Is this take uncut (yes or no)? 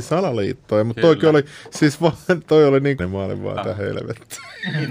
no